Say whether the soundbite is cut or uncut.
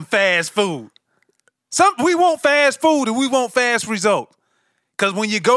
uncut